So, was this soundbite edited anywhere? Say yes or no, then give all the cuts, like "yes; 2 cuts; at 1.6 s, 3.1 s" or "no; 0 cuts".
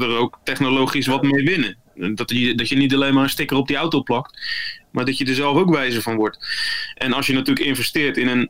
no; 0 cuts